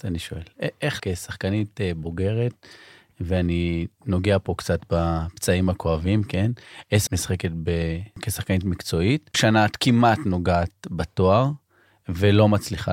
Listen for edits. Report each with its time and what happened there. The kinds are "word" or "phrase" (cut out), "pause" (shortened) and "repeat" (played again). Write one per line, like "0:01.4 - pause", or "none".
0:01.0 - word
0:07.1 - word
0:09.3 - word